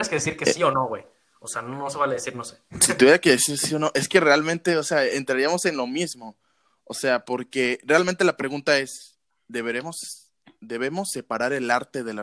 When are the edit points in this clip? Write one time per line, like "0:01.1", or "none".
none